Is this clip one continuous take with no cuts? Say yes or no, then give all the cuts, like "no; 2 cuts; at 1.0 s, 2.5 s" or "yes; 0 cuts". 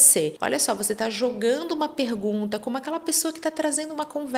yes; 0 cuts